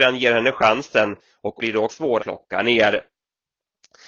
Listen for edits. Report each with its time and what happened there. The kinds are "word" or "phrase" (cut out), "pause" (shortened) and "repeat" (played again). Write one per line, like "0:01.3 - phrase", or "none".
0:01.6 - word
0:01.9 - word
0:02.2 - word

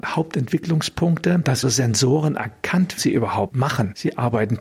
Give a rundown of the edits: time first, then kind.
0:01.6 - phrase
0:03.0 - phrase

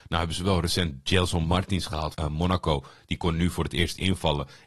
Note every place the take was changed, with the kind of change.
0:02.1 - word

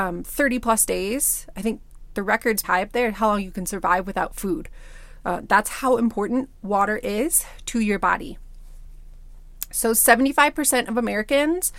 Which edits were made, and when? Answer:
0:02.6 - word

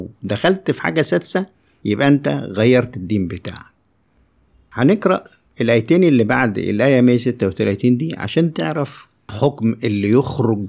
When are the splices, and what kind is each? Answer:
none

